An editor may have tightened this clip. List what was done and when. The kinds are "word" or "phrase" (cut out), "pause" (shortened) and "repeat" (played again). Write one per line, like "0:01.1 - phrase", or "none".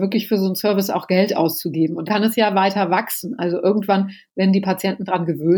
0:02.1 - word